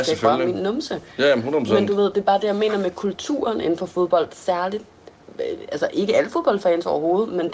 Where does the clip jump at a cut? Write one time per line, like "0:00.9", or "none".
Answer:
none